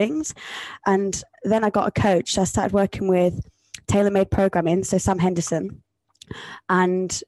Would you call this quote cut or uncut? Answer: uncut